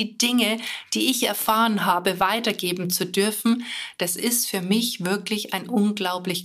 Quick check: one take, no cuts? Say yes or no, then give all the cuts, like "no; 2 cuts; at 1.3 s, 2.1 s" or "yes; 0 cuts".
yes; 0 cuts